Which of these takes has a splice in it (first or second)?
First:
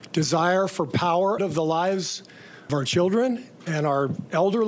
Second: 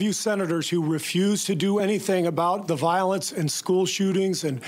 first